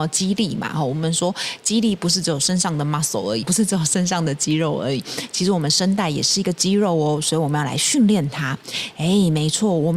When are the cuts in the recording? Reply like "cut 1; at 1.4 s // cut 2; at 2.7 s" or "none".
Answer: cut 1; at 3.4 s

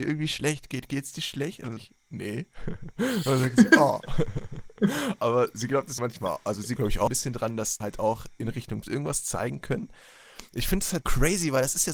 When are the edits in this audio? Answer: cut 1; at 1.8 s // cut 2; at 5.2 s // cut 3; at 6.0 s // cut 4; at 6.8 s // cut 5; at 7.1 s // cut 6; at 7.8 s // cut 7; at 8.8 s // cut 8; at 11.0 s

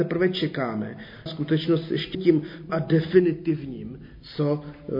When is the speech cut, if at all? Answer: cut 1; at 1.3 s // cut 2; at 2.1 s // cut 3; at 2.7 s

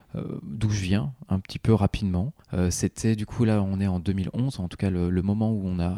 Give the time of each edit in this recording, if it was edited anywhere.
cut 1; at 2.4 s

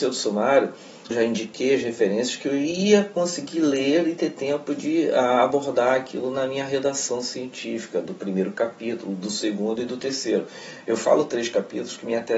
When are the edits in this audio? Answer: cut 1; at 1.1 s

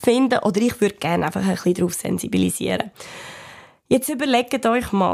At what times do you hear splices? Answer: none

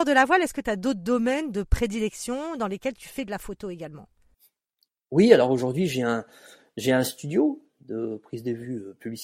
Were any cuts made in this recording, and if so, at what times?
none

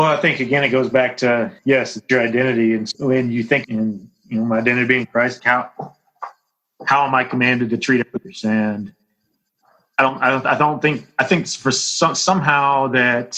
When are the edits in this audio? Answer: cut 1; at 1.6 s // cut 2; at 2.9 s // cut 3; at 3.6 s // cut 4; at 5.4 s

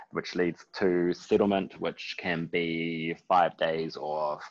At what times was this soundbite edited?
none

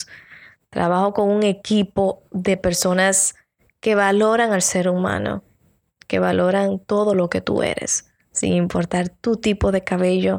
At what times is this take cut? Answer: none

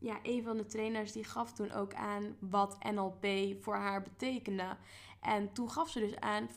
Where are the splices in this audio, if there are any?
none

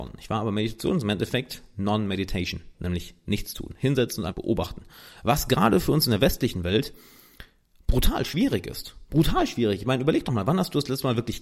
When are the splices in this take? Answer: cut 1; at 4.3 s

